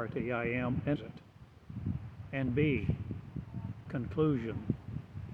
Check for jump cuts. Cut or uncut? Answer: cut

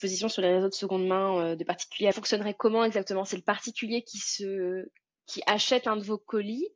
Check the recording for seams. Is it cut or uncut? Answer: cut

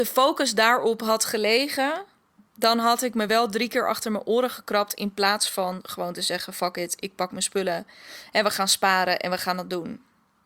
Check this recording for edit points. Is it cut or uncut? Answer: uncut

